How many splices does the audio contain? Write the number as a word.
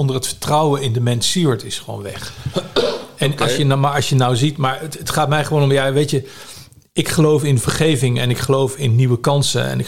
zero